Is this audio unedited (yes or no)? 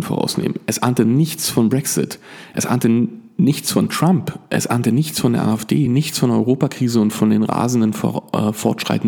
yes